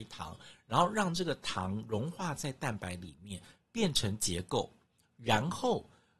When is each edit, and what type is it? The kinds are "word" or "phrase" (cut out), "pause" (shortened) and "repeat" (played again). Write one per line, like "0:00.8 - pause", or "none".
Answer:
none